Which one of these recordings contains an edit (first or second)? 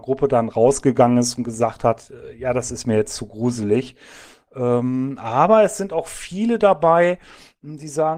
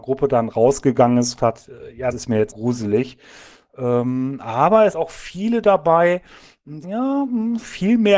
second